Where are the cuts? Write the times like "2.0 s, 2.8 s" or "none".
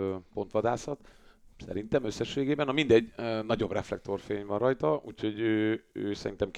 none